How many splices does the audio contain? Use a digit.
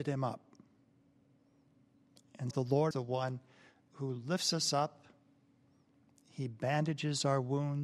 2